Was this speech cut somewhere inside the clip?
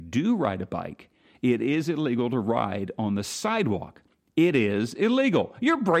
no; 0 cuts

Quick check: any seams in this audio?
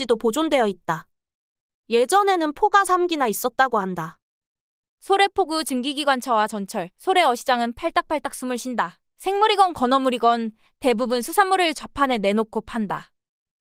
yes; 1 cut; at 9.1 s

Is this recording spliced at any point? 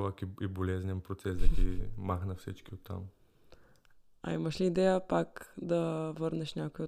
no; 0 cuts

